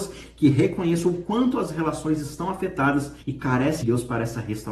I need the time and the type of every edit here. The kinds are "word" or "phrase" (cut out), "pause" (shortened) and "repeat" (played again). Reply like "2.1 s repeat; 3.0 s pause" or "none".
3.2 s pause; 3.8 s word